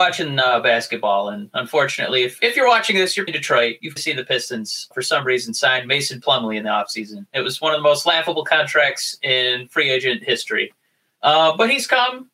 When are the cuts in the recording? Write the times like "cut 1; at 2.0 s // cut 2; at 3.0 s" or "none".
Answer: cut 1; at 3.3 s // cut 2; at 4.0 s // cut 3; at 4.9 s